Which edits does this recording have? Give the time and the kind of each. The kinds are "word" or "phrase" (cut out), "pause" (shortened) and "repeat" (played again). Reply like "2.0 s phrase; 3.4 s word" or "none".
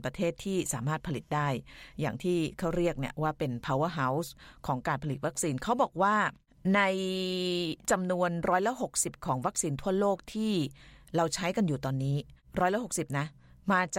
none

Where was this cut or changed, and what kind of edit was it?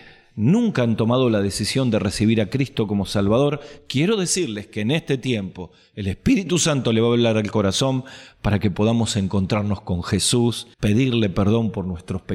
10.7 s pause

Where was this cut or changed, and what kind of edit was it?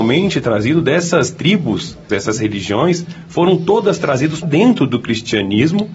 2.1 s word; 4.4 s word

